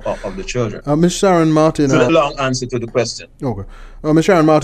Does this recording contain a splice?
yes; 2 cuts; at 2.1 s, 2.7 s

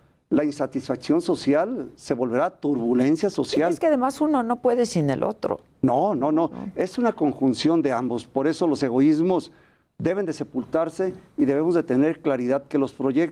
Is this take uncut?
yes; 0 cuts

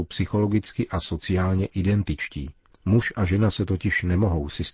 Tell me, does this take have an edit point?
yes; 1 cut; at 2.7 s

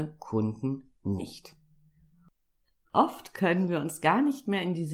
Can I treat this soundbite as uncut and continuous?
yes; 0 cuts

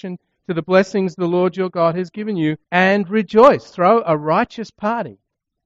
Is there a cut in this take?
yes; 1 cut; at 2.6 s

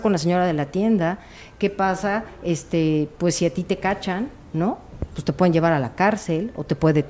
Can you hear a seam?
no; 0 cuts

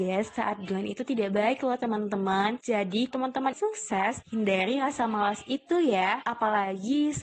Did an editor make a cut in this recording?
yes; 2 cuts; at 3.1 s, 3.5 s

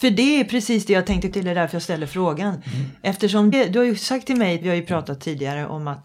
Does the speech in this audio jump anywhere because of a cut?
yes; 3 cuts; at 1.3 s, 3.5 s, 4.6 s

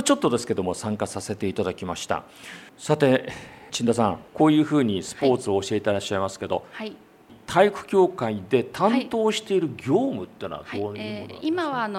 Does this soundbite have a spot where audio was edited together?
yes; 2 cuts; at 2.7 s, 4.3 s

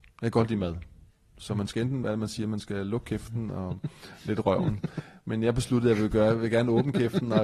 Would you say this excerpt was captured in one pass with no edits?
no; 1 cut; at 2.0 s

